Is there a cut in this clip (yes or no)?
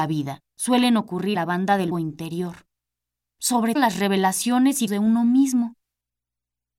yes